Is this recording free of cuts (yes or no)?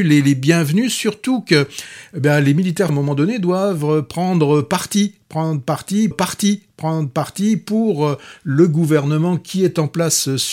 no